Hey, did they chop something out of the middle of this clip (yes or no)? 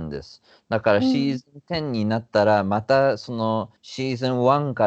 yes